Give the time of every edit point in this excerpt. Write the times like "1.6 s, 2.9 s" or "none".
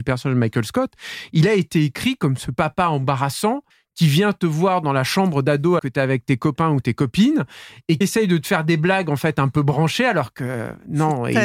3.7 s, 5.8 s, 8.0 s